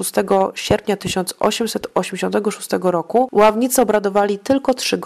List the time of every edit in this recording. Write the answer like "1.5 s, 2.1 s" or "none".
none